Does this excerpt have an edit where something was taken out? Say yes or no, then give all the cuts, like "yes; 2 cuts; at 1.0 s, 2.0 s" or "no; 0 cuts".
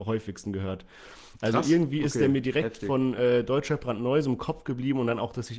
no; 0 cuts